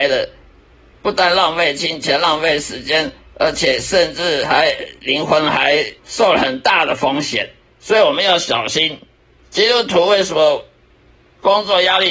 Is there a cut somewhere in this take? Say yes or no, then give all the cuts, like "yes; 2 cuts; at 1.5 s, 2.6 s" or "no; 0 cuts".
yes; 3 cuts; at 6.0 s, 7.7 s, 9.4 s